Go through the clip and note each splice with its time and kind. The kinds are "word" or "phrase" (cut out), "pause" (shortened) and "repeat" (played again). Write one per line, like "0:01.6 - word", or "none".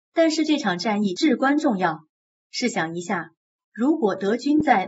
none